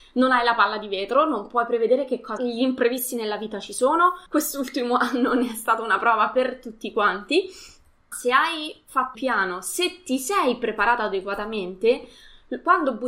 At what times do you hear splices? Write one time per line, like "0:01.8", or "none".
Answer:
0:02.4
0:04.3
0:08.1
0:09.1